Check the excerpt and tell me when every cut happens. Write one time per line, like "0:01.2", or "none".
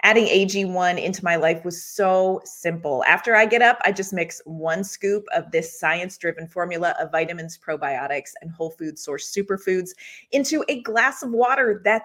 none